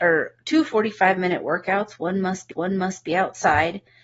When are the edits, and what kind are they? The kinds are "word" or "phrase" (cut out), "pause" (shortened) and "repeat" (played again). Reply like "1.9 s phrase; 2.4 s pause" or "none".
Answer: 2.5 s repeat